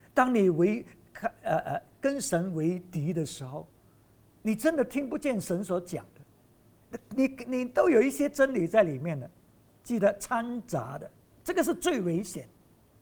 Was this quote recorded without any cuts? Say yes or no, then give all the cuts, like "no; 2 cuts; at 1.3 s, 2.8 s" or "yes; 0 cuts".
yes; 0 cuts